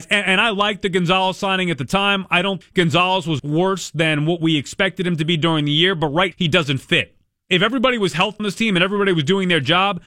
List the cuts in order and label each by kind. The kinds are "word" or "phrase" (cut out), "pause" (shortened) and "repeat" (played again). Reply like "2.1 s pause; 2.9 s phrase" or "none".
2.6 s word; 3.4 s word; 6.3 s word; 8.4 s word